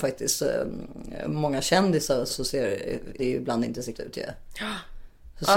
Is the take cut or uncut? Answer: cut